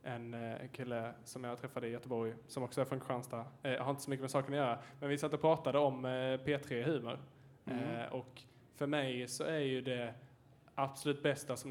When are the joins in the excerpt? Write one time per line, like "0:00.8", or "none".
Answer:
none